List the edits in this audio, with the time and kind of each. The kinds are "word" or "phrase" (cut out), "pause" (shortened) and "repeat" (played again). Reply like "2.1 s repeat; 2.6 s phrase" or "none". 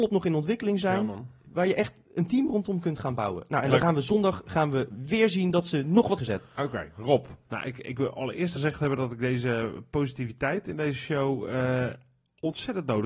6.2 s phrase; 8.5 s word